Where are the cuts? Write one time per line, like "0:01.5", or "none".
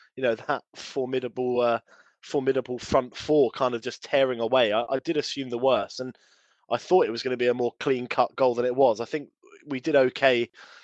none

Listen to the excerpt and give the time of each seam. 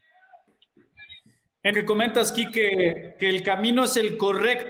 0:01.7
0:03.2

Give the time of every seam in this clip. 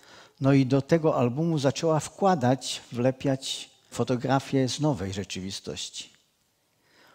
0:03.9

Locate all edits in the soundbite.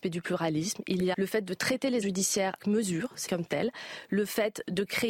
0:01.1
0:02.0
0:02.6
0:03.3

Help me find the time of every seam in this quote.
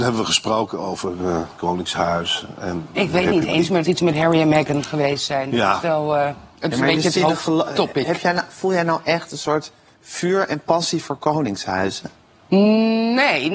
0:01.6
0:03.8

